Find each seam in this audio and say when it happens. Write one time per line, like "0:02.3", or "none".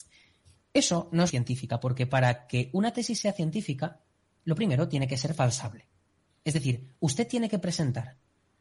0:01.3